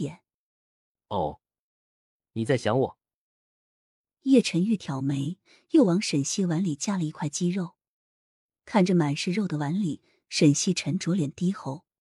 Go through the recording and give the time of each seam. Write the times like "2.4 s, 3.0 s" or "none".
none